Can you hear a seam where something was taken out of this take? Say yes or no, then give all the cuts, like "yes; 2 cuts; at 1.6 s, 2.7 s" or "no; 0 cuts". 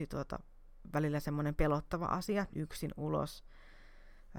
yes; 1 cut; at 2.5 s